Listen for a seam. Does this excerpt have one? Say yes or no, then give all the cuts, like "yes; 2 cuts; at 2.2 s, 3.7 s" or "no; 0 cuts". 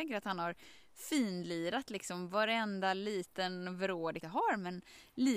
yes; 1 cut; at 4.2 s